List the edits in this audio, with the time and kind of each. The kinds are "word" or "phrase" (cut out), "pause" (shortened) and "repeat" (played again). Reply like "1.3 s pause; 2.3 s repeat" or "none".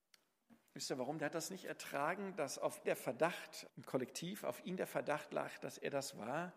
2.8 s word; 3.7 s word